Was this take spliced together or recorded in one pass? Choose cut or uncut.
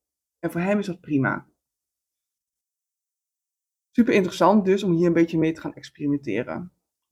uncut